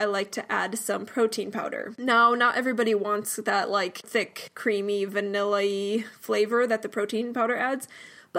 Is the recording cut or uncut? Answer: uncut